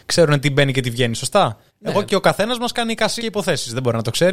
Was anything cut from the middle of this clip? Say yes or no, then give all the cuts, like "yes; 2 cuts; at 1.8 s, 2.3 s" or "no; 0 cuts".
yes; 3 cuts; at 1.7 s, 2.1 s, 3.2 s